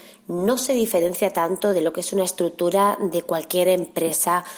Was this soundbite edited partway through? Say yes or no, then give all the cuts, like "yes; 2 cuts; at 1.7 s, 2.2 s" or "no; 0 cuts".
no; 0 cuts